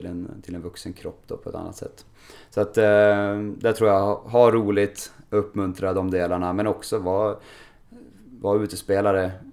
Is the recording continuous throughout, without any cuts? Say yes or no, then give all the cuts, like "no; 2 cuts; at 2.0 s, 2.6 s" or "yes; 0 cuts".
yes; 0 cuts